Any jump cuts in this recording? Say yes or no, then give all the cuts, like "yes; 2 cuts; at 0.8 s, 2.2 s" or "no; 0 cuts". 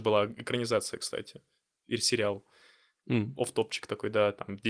no; 0 cuts